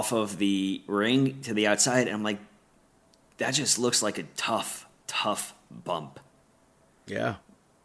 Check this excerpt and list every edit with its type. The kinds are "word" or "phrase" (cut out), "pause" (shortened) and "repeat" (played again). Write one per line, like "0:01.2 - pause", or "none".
none